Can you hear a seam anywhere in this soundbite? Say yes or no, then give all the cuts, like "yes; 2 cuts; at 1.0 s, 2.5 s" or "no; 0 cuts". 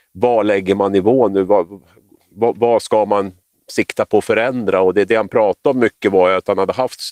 no; 0 cuts